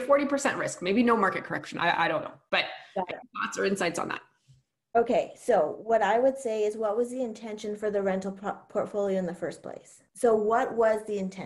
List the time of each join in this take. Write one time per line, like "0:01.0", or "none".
none